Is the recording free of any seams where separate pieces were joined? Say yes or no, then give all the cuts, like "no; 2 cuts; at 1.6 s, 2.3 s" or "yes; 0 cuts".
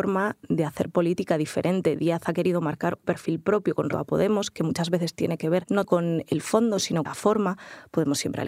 no; 4 cuts; at 3.0 s, 3.9 s, 5.8 s, 7.0 s